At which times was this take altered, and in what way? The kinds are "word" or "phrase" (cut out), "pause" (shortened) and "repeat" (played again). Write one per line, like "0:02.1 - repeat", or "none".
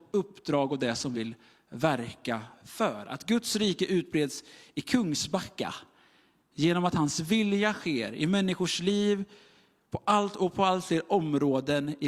0:01.1 - word